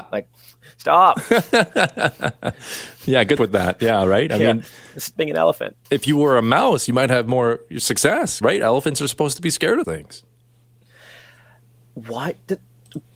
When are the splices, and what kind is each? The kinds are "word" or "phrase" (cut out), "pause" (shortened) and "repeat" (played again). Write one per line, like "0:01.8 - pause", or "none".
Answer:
0:03.4 - word
0:05.2 - word
0:05.8 - pause
0:08.4 - word
0:09.8 - word